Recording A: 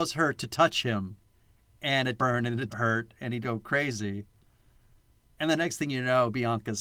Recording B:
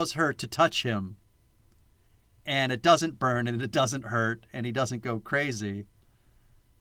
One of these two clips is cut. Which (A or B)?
A